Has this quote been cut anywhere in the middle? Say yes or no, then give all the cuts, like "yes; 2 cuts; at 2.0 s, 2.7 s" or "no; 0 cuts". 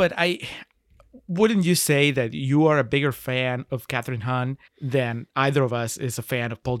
yes; 1 cut; at 4.7 s